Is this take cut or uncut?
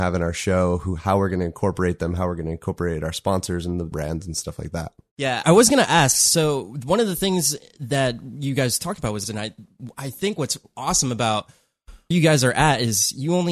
cut